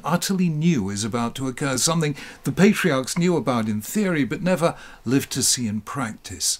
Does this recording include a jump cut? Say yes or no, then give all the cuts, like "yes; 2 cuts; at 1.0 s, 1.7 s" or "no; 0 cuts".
no; 0 cuts